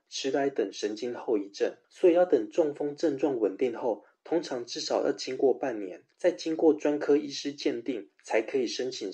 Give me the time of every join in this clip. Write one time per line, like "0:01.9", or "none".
0:01.8
0:06.1